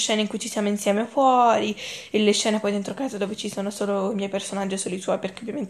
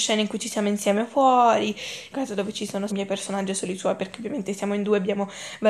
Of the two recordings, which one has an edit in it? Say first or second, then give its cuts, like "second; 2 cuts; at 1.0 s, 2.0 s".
second; 2 cuts; at 2.1 s, 2.9 s